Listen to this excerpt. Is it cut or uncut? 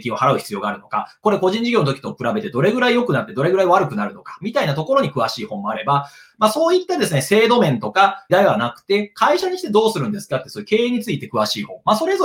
cut